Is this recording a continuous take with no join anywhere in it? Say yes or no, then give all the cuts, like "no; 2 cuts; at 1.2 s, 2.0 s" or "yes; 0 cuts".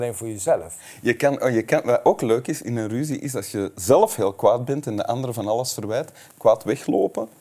yes; 0 cuts